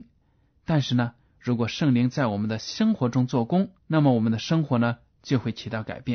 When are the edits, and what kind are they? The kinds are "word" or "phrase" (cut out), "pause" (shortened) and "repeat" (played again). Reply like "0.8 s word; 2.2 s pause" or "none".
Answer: 3.8 s pause